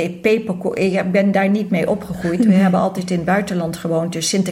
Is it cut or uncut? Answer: uncut